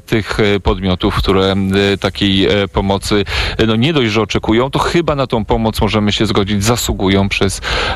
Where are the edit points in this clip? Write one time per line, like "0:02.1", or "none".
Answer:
none

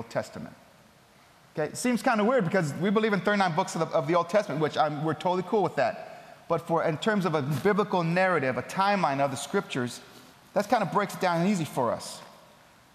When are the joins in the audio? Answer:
none

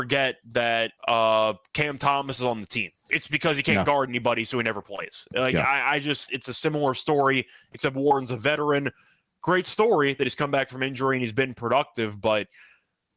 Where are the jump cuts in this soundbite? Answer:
0:01.0
0:03.0
0:06.3

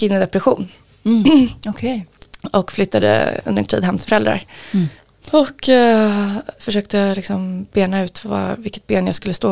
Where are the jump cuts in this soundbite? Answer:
0:03.7
0:04.1
0:05.0
0:06.6
0:08.2

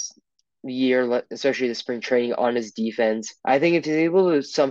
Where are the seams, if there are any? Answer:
0:03.4

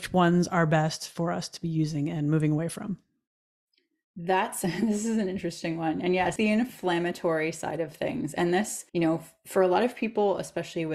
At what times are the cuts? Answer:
0:06.4
0:08.9

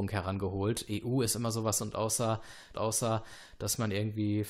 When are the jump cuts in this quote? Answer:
0:01.8
0:02.7

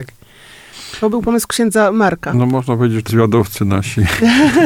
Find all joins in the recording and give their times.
0:03.1

